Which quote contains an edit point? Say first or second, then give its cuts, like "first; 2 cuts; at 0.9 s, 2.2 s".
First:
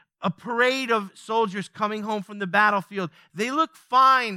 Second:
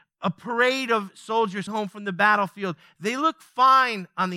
second; 1 cut; at 1.7 s